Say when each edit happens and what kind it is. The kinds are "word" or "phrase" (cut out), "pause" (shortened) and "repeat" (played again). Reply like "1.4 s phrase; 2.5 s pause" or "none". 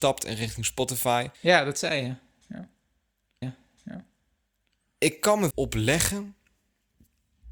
1.3 s pause; 3.4 s repeat; 5.5 s phrase